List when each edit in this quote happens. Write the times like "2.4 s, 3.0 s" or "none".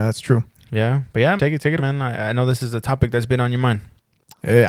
1.4 s, 1.8 s